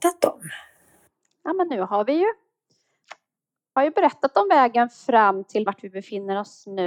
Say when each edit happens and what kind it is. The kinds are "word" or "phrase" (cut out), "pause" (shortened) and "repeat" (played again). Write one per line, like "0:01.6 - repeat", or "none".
0:03.8 - word
0:05.7 - word